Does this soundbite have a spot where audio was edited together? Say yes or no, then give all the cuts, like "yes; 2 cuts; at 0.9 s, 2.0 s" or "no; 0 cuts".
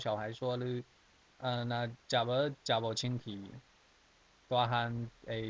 yes; 1 cut; at 1.1 s